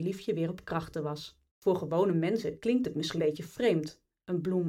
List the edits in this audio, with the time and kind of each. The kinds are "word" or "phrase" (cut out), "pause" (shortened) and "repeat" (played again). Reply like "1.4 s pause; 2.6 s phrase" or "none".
1.5 s pause; 3.2 s word